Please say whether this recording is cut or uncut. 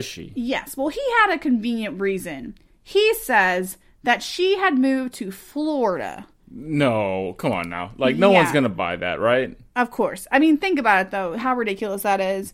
uncut